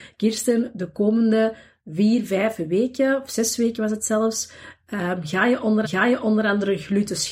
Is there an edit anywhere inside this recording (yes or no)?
yes